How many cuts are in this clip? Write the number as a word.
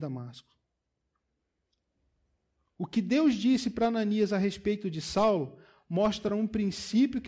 zero